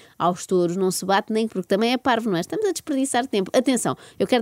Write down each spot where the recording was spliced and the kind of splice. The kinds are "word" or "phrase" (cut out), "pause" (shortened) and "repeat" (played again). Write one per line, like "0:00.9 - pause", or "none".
0:01.5 - phrase